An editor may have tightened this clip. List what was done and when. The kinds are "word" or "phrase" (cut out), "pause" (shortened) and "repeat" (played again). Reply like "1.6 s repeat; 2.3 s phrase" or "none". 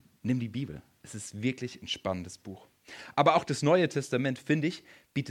none